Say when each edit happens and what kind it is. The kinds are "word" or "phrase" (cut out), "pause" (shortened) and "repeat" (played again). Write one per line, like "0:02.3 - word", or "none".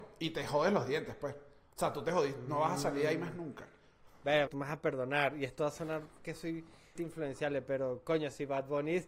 0:04.5 - word
0:07.0 - word